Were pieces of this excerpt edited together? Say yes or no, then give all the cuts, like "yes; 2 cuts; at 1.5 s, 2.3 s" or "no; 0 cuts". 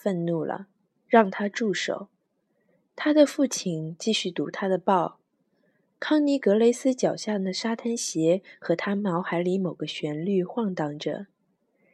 no; 0 cuts